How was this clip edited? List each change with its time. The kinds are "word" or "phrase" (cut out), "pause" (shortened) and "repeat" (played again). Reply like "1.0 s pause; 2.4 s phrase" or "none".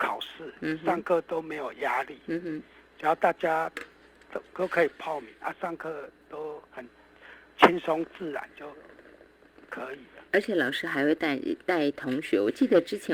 6.7 s pause; 10.3 s pause

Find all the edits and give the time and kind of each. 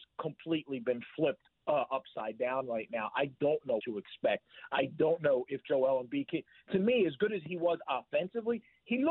3.8 s word

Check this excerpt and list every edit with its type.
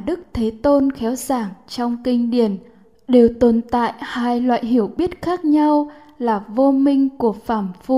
none

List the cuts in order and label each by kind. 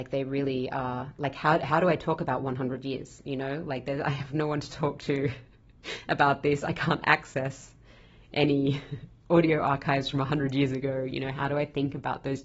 none

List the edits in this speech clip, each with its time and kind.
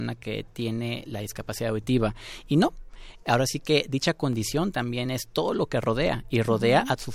none

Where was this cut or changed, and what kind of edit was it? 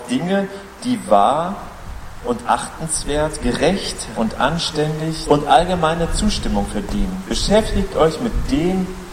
4.1 s word; 5.2 s word

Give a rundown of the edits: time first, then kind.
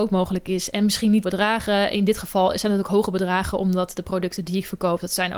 1.2 s word

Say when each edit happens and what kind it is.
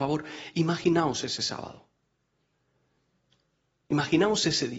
none

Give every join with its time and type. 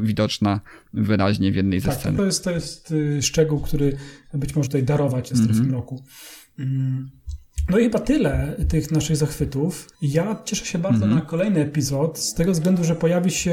2.2 s phrase; 4.7 s word; 5.3 s word; 9.9 s pause

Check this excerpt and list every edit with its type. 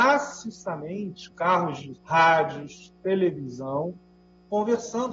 1.3 s word; 2.0 s word

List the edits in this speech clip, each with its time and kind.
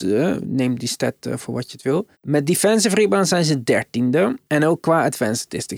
2.1 s pause; 4.4 s pause

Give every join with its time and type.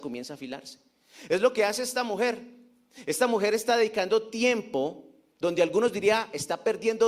5.3 s word

